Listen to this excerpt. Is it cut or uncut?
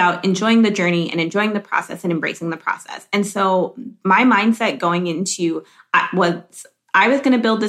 uncut